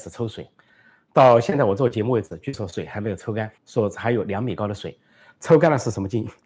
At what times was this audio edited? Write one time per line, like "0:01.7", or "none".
0:03.6